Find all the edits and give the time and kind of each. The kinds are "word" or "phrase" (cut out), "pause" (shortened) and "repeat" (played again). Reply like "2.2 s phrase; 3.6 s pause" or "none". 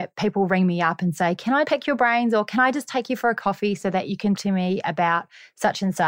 1.6 s word; 4.3 s word